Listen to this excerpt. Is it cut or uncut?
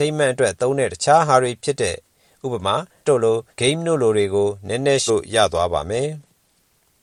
cut